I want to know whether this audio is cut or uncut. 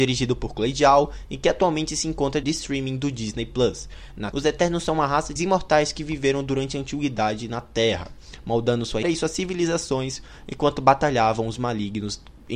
cut